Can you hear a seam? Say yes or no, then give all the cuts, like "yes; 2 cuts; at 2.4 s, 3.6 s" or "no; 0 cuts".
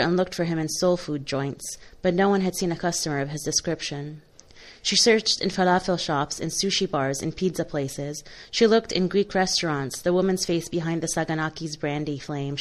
no; 0 cuts